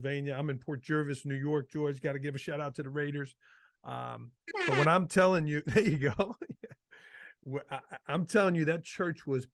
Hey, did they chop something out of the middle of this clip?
no; 0 cuts

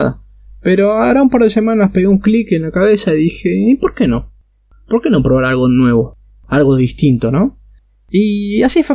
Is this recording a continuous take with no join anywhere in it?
yes; 0 cuts

